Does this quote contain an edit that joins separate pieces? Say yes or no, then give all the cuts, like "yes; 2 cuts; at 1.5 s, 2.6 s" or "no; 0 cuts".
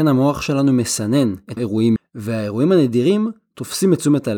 yes; 2 cuts; at 1.6 s, 2.0 s